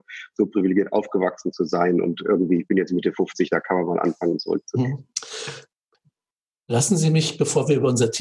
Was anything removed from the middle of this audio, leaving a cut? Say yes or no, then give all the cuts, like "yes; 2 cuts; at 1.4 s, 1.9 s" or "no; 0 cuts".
no; 0 cuts